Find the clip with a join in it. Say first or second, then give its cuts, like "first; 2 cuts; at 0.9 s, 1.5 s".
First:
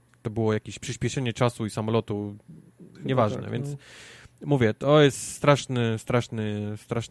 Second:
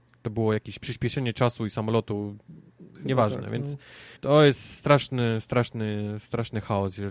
second; 1 cut; at 4.2 s